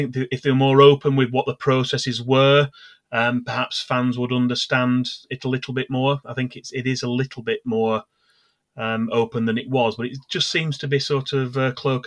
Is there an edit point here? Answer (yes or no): no